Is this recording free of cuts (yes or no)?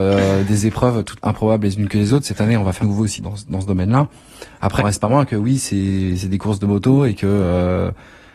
no